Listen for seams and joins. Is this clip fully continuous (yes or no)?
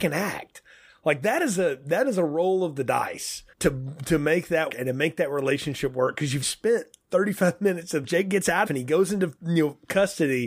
no